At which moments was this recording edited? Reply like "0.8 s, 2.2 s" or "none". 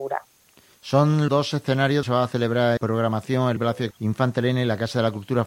1.3 s, 2.0 s, 2.8 s, 3.6 s, 3.9 s